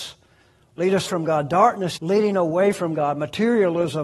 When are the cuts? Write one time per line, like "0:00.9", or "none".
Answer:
0:01.1
0:02.0